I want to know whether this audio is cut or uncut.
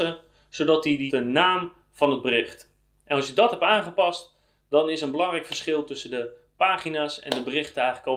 cut